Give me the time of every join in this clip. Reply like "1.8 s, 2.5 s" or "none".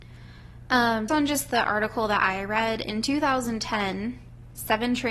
1.1 s